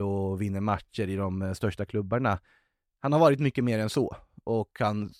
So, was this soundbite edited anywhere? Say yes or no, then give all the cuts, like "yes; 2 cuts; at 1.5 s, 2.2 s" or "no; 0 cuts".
no; 0 cuts